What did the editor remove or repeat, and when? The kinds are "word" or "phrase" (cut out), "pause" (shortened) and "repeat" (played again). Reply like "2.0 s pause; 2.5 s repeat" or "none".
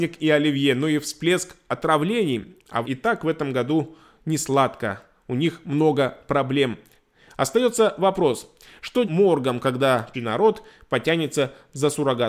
2.8 s word; 9.0 s word; 10.1 s word